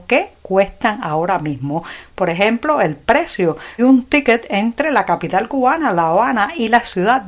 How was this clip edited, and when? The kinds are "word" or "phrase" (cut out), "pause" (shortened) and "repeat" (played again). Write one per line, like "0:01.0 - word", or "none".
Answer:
0:03.8 - word